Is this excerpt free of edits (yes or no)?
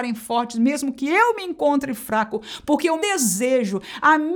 no